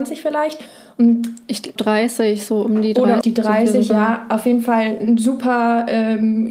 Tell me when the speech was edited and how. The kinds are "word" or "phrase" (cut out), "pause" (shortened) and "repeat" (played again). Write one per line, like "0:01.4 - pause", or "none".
0:01.8 - phrase
0:03.2 - word